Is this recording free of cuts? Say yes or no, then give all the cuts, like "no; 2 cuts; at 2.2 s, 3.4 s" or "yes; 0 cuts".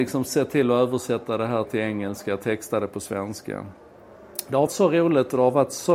no; 2 cuts; at 1.7 s, 4.7 s